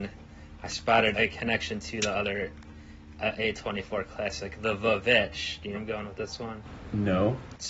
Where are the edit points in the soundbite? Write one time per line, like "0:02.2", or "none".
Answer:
0:01.1
0:05.7